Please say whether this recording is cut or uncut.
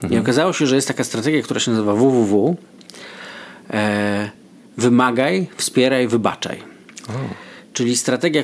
uncut